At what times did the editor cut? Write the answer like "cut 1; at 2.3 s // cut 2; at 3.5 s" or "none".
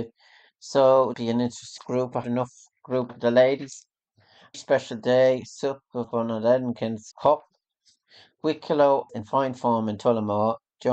cut 1; at 1.1 s // cut 2; at 1.8 s // cut 3; at 2.2 s // cut 4; at 3.1 s // cut 5; at 4.5 s // cut 6; at 6.0 s // cut 7; at 7.1 s // cut 8; at 9.1 s

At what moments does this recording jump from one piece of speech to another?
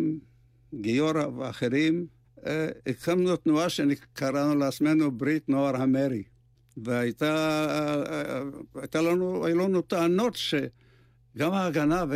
none

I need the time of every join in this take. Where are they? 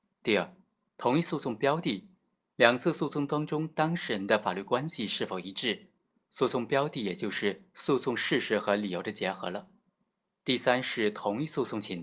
none

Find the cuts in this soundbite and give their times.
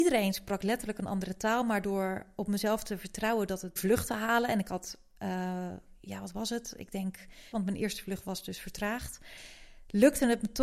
cut 1; at 3.8 s // cut 2; at 7.5 s

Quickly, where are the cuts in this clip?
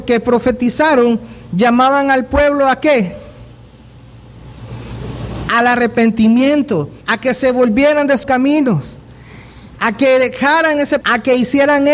cut 1; at 7.0 s // cut 2; at 8.2 s // cut 3; at 11.0 s

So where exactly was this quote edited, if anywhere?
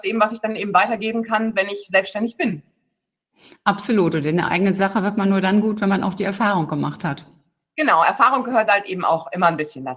none

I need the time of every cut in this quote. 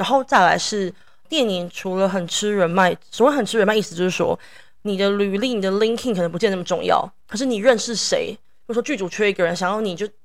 none

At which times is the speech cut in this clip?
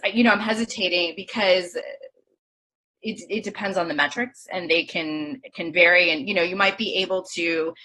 none

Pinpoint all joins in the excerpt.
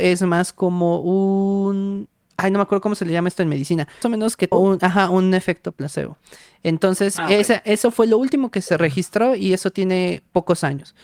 cut 1; at 4.0 s // cut 2; at 4.5 s

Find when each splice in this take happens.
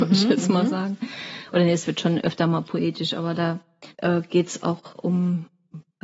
cut 1; at 3.9 s

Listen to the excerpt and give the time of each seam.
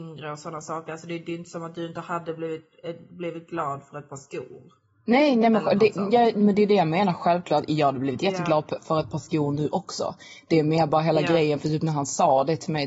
none

